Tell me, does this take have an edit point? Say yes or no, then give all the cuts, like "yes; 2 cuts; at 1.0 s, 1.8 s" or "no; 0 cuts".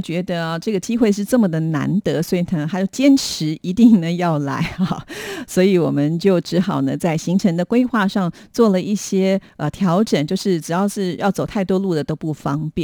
no; 0 cuts